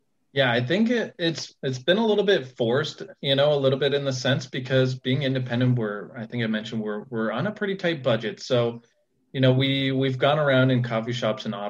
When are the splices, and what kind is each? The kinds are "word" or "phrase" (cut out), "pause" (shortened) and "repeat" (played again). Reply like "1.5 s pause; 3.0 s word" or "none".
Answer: none